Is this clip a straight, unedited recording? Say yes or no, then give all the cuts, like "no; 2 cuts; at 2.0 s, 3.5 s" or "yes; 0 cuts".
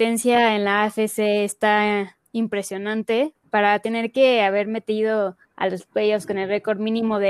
no; 1 cut; at 5.4 s